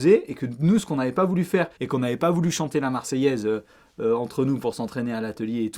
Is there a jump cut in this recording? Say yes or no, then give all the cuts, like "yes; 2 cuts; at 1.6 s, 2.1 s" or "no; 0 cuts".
yes; 1 cut; at 1.8 s